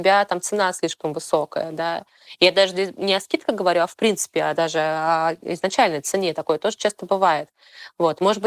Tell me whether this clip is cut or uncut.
uncut